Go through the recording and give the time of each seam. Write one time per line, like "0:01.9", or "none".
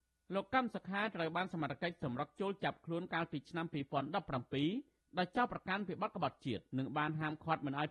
0:06.7